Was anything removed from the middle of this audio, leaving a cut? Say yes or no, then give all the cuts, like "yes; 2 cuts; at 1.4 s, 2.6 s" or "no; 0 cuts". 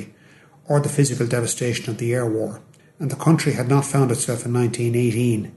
yes; 1 cut; at 2.8 s